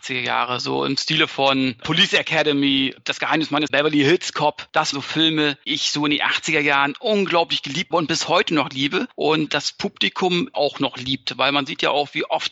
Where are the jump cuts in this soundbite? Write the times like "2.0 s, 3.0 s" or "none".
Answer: 3.7 s, 4.9 s, 5.7 s, 7.9 s, 9.5 s, 10.5 s